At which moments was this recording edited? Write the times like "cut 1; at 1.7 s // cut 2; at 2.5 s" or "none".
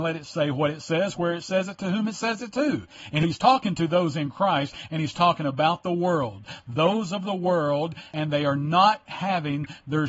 none

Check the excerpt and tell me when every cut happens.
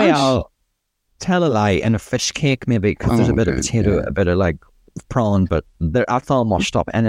none

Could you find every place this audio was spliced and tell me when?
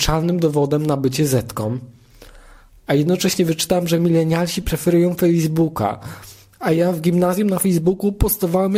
none

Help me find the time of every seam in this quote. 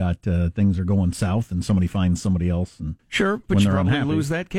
cut 1; at 3.0 s

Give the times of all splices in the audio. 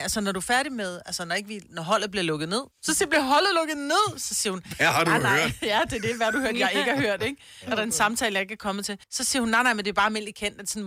cut 1; at 1.7 s // cut 2; at 2.7 s // cut 3; at 9.0 s

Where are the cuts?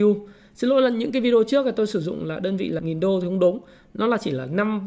cut 1; at 2.8 s

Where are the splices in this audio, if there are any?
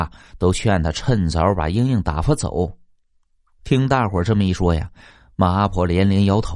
none

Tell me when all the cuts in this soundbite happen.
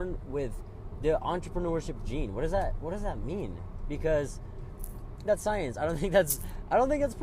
cut 1; at 5.3 s

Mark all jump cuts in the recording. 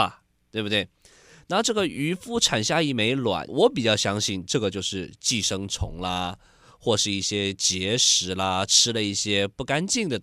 cut 1; at 3.5 s

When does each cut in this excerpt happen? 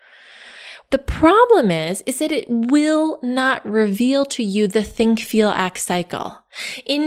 none

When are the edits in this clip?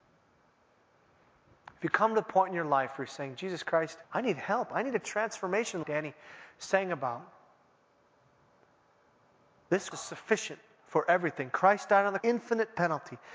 cut 1; at 4.0 s // cut 2; at 5.8 s // cut 3; at 9.9 s // cut 4; at 12.2 s

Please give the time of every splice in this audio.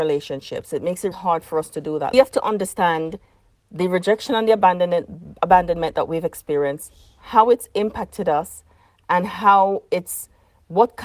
cut 1; at 1.1 s // cut 2; at 2.1 s

